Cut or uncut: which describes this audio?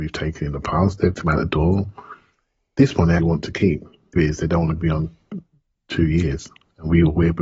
cut